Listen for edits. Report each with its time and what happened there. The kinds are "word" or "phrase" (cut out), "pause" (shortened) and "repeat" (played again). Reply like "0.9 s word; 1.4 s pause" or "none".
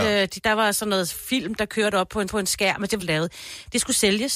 2.3 s repeat; 3.0 s phrase